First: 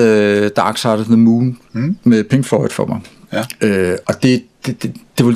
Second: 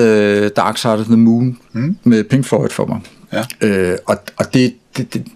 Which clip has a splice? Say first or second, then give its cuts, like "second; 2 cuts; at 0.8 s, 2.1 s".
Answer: first; 1 cut; at 4.0 s